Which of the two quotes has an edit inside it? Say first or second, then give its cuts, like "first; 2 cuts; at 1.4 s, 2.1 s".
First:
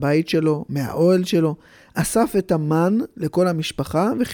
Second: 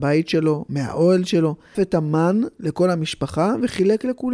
second; 1 cut; at 1.7 s